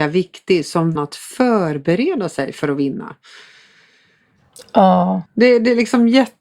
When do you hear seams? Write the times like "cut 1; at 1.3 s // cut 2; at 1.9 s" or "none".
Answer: cut 1; at 1.0 s // cut 2; at 5.3 s